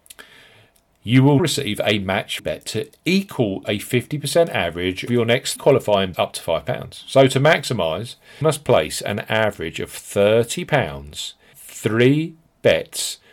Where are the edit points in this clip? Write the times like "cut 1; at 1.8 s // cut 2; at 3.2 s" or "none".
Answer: cut 1; at 1.4 s // cut 2; at 2.4 s // cut 3; at 3.6 s // cut 4; at 5.1 s // cut 5; at 5.6 s // cut 6; at 6.1 s // cut 7; at 8.4 s // cut 8; at 11.5 s